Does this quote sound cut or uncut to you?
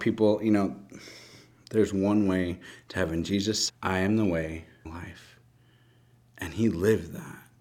cut